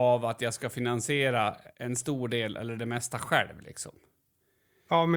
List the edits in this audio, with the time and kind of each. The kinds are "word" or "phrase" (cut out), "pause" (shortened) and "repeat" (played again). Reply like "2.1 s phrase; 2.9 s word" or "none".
1.7 s pause